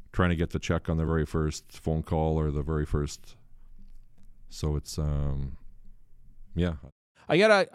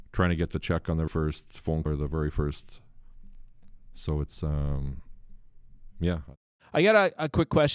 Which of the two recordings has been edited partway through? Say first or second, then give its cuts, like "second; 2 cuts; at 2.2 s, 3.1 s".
second; 2 cuts; at 1.1 s, 1.9 s